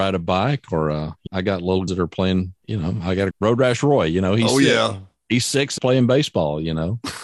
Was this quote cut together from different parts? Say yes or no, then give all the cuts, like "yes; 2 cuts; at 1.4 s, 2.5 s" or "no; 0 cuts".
yes; 5 cuts; at 1.3 s, 1.9 s, 2.6 s, 3.3 s, 5.8 s